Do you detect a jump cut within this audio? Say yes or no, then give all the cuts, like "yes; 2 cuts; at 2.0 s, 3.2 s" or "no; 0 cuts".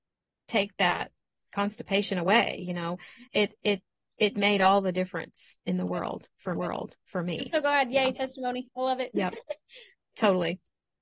yes; 4 cuts; at 3.3 s, 4.1 s, 5.6 s, 6.6 s